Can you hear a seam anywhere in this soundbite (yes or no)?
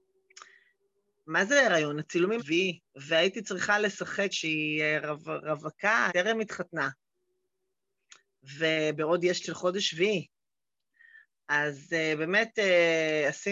yes